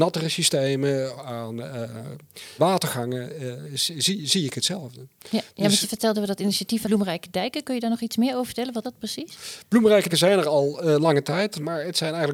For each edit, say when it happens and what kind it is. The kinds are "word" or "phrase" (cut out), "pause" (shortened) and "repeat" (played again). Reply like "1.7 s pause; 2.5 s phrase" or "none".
1.2 s word; 2.6 s word; 6.1 s word; 6.8 s word; 8.8 s word; 10.1 s word